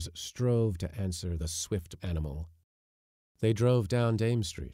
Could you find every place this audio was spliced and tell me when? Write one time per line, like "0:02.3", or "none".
0:01.4
0:02.0